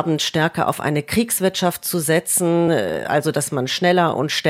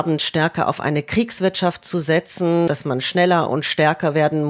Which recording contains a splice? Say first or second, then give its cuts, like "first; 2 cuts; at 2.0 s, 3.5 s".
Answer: second; 1 cut; at 2.7 s